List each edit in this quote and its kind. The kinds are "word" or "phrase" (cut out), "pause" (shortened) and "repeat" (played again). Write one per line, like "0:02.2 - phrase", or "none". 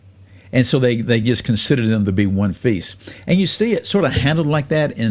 none